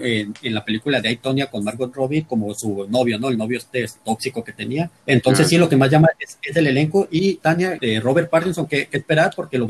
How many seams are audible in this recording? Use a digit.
1